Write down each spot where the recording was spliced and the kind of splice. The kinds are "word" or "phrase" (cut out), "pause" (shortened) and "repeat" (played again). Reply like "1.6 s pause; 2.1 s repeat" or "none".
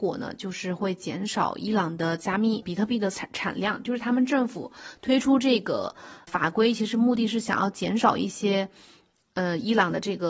2.6 s word; 6.3 s word